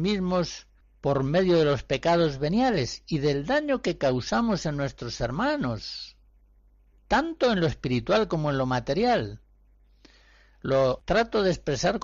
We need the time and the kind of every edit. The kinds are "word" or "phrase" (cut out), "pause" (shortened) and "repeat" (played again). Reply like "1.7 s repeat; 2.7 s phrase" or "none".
none